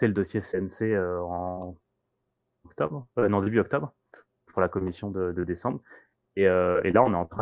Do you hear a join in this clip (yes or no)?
no